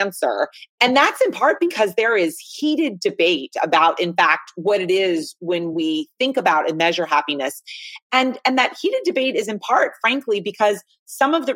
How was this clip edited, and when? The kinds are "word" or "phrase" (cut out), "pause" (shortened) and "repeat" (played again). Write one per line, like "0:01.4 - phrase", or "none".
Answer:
none